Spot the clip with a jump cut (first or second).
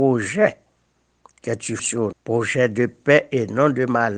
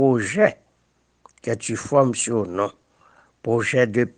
first